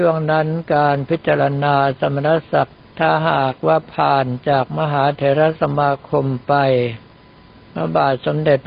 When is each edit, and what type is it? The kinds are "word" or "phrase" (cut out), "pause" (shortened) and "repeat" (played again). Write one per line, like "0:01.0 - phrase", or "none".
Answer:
0:02.8 - pause